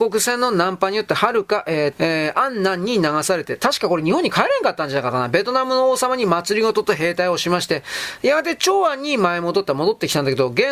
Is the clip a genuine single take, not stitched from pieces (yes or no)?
no